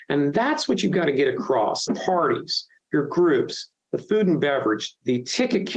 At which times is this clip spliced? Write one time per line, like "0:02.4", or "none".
0:01.9